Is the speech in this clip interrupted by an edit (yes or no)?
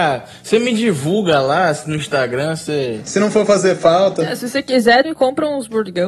yes